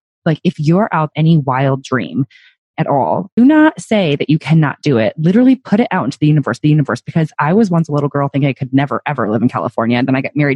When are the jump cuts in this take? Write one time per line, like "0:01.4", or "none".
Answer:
0:01.1
0:02.7
0:03.4
0:06.6